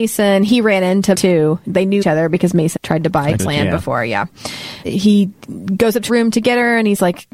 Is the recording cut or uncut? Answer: cut